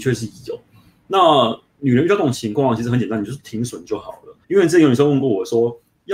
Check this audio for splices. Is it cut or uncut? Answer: cut